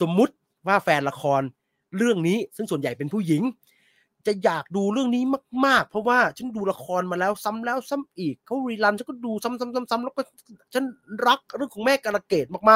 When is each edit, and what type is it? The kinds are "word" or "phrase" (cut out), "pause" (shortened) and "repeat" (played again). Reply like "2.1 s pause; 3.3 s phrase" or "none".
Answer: none